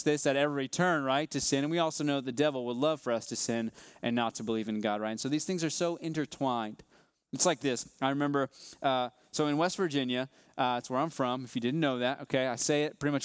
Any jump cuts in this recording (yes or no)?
no